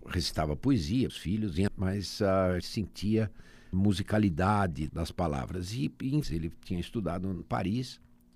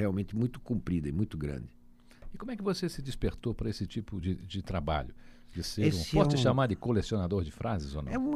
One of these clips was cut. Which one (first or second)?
first